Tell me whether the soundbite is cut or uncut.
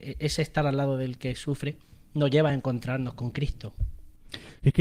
uncut